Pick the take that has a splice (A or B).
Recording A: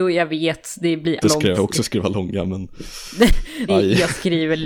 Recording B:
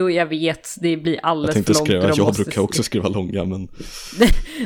A